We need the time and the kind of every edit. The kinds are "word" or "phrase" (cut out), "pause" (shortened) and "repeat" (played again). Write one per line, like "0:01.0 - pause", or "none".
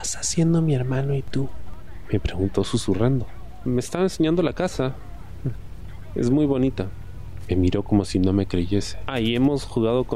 none